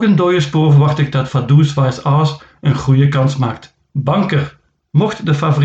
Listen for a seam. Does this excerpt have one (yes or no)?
no